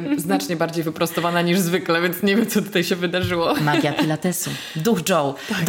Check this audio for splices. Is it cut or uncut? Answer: uncut